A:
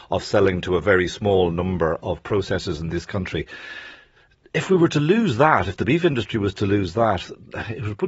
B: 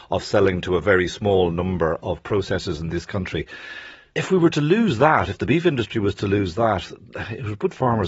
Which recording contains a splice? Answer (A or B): B